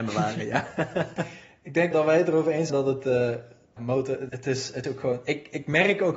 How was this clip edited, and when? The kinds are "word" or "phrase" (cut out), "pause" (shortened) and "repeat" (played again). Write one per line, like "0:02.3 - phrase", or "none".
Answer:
0:01.9 - word
0:02.7 - word
0:03.8 - word
0:04.3 - word
0:04.8 - word